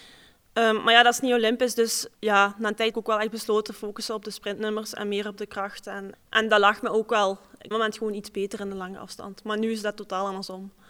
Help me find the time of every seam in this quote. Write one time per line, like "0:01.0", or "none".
0:02.1
0:02.9
0:03.7
0:06.1
0:07.7